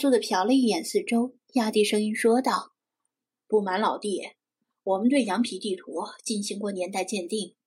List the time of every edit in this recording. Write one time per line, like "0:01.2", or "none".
0:02.8